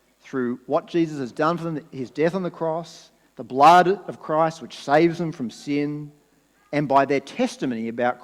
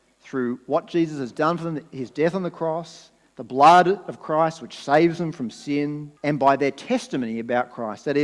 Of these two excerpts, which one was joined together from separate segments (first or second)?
second